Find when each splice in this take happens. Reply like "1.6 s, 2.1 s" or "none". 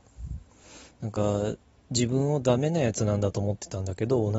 none